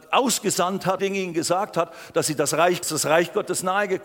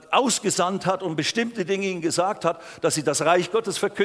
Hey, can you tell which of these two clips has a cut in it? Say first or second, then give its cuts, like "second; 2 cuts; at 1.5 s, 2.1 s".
first; 2 cuts; at 1.0 s, 2.8 s